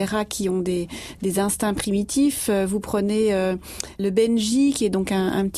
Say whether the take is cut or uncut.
uncut